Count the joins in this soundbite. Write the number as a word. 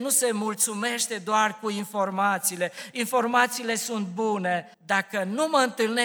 one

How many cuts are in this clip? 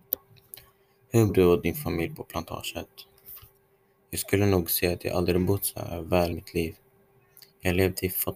two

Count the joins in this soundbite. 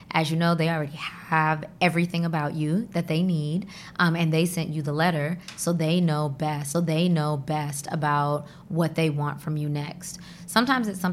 one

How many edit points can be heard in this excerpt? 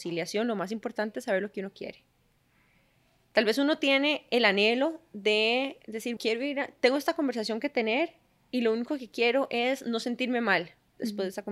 one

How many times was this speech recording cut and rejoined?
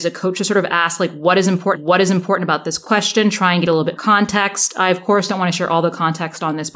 two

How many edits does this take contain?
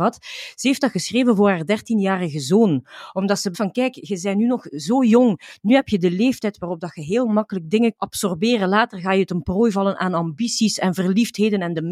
two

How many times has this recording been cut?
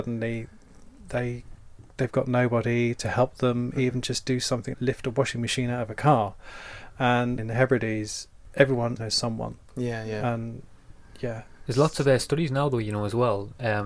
three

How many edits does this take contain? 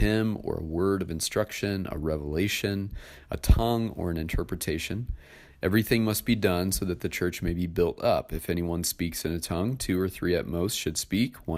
zero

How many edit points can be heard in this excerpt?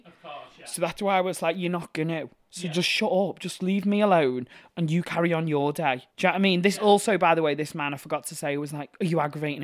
one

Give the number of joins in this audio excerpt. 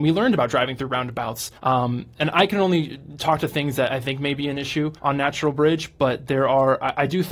three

